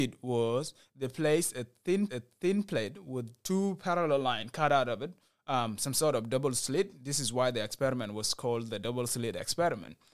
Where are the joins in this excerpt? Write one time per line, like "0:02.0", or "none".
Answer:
0:02.1